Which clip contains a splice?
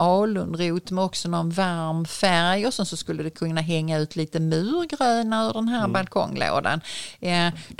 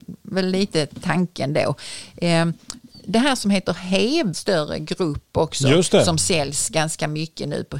second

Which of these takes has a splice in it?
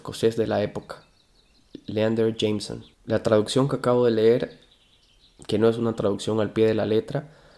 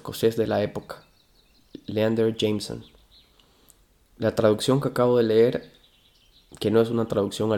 first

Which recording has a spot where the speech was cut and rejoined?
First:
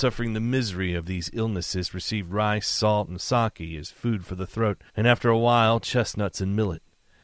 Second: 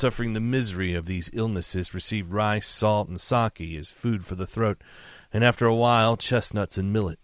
first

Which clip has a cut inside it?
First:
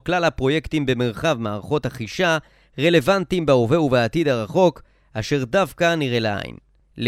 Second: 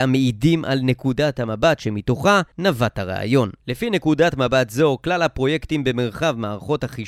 second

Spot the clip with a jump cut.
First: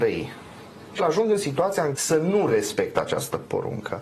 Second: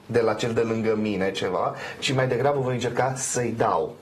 first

